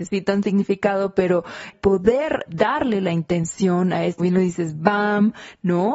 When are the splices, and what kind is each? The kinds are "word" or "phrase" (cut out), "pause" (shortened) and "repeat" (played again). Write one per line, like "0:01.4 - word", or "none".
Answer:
0:01.7 - word
0:02.5 - word
0:04.2 - word

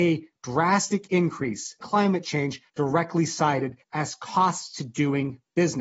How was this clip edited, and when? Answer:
0:01.8 - phrase
0:02.7 - pause
0:03.8 - pause

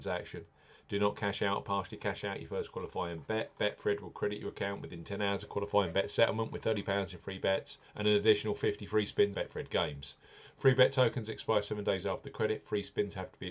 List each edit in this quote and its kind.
0:07.9 - pause
0:09.3 - word

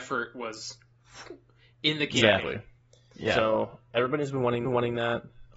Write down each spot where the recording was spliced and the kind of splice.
0:04.6 - repeat

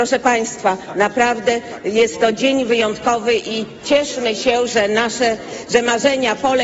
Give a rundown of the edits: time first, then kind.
none

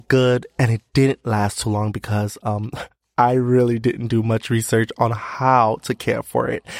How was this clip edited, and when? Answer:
none

